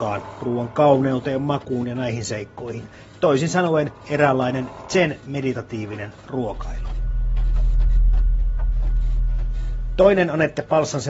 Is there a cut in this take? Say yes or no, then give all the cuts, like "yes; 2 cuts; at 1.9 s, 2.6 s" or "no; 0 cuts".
no; 0 cuts